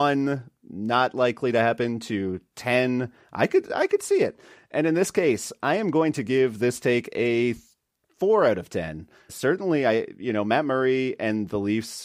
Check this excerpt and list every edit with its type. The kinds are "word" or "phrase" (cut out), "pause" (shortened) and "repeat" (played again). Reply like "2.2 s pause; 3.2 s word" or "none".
9.3 s word